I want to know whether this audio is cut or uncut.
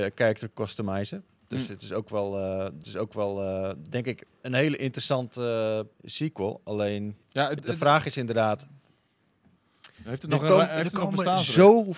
cut